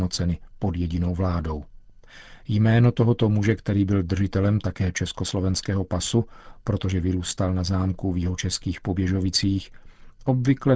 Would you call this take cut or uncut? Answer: uncut